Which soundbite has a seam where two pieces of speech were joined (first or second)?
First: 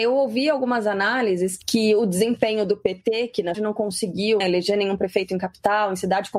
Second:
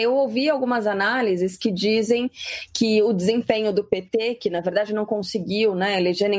first